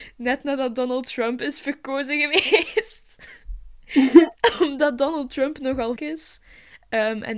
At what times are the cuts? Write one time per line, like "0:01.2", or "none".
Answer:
0:06.0